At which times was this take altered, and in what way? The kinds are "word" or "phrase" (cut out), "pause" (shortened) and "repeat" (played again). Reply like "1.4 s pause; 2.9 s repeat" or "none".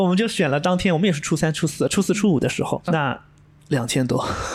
2.9 s word